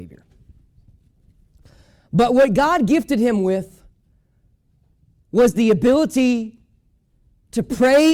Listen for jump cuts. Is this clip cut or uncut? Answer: uncut